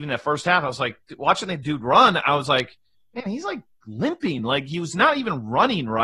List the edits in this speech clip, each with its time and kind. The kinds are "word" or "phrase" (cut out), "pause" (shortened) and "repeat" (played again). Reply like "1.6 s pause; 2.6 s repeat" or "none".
none